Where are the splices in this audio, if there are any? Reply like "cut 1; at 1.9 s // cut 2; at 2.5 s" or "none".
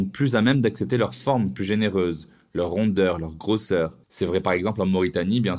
cut 1; at 4.0 s